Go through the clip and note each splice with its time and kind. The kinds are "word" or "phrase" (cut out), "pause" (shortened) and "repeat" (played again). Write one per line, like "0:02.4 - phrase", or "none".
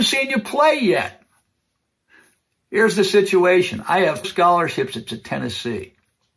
0:04.2 - word
0:05.1 - repeat